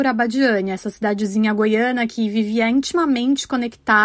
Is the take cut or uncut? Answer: uncut